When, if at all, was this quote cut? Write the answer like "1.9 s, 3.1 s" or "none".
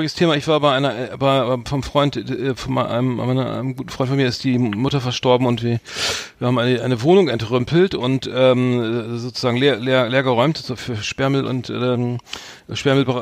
none

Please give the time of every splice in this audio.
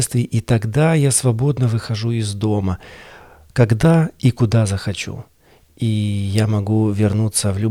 none

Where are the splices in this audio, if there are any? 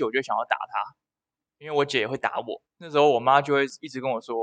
2.7 s

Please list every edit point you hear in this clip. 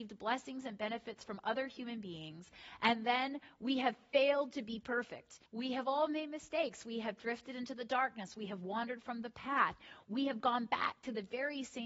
5.5 s

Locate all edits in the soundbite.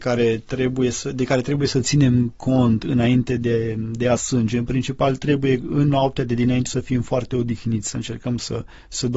4.2 s, 6.7 s

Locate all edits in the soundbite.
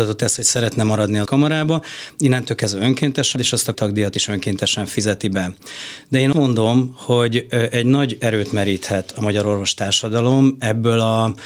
1.3 s, 3.4 s, 3.7 s, 6.3 s

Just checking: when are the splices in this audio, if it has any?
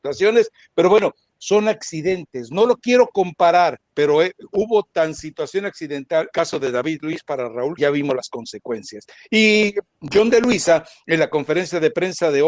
3.8 s, 6.3 s, 7.8 s

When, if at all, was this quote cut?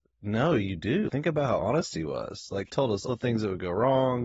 2.7 s, 3.1 s

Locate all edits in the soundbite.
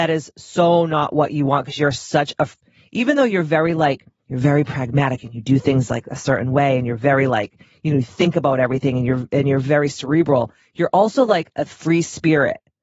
none

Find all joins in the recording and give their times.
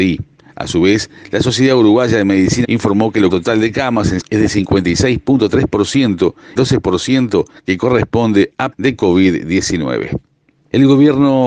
2.6 s, 3.3 s, 4.2 s, 6.6 s, 8.7 s

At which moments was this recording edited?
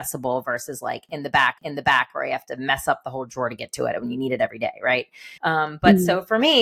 1.6 s, 5.4 s

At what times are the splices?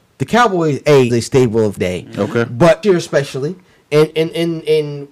1.1 s, 1.8 s, 2.8 s, 4.1 s

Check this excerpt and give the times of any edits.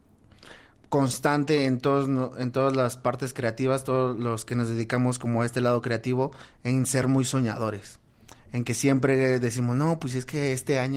none

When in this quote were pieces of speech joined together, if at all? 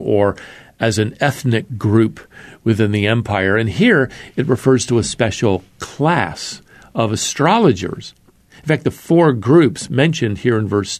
none

